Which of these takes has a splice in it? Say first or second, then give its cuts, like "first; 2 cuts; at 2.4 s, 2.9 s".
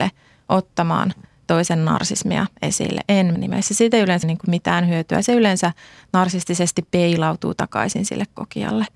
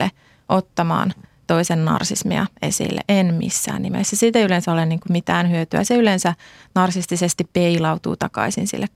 first; 2 cuts; at 3.4 s, 4.2 s